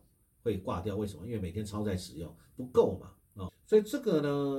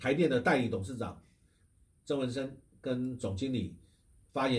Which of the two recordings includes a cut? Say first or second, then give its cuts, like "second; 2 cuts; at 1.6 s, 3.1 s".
first; 1 cut; at 3.5 s